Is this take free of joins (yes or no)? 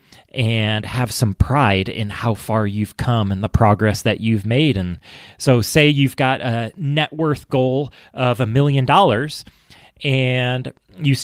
yes